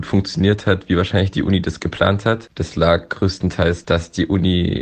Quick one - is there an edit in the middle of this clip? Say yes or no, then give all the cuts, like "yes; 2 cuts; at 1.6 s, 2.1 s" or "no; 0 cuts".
yes; 1 cut; at 3.8 s